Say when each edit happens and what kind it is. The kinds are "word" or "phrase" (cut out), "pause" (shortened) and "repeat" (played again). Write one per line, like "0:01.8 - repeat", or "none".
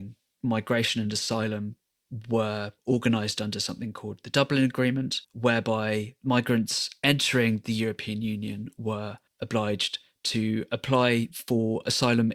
0:02.8 - pause
0:05.2 - pause
0:09.3 - pause